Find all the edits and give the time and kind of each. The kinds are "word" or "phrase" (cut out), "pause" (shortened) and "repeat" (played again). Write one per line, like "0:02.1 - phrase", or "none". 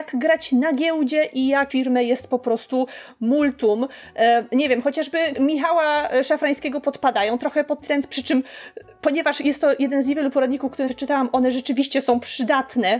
0:01.7 - word
0:05.3 - word
0:07.8 - word
0:10.9 - word